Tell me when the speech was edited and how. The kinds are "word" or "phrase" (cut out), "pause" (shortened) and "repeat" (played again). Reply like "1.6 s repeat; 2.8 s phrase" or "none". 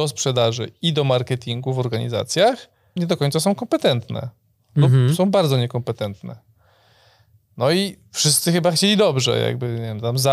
3.0 s word